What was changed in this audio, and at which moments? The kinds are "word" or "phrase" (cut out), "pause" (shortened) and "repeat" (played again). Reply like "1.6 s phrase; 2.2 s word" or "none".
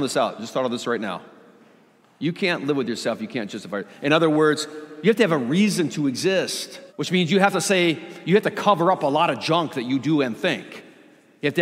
6.9 s pause